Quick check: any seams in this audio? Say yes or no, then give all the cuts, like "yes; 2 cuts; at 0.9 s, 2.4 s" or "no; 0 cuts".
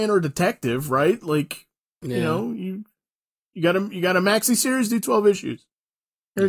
no; 0 cuts